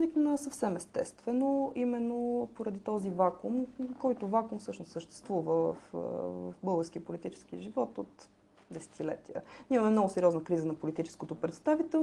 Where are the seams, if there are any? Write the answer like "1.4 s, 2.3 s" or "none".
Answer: none